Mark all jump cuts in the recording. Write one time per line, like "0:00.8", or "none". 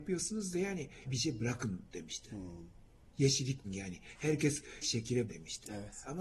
0:01.1
0:03.6
0:04.8
0:05.3